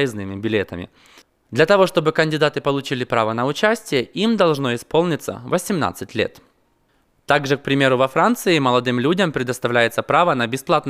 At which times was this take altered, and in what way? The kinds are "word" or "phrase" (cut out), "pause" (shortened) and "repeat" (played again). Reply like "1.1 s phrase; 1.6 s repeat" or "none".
none